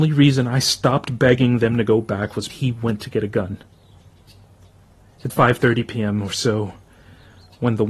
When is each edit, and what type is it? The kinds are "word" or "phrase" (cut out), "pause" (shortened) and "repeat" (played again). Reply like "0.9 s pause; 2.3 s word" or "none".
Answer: 2.5 s word; 5.3 s word